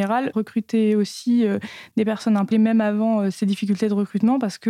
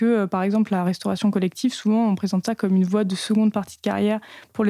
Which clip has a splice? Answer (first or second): first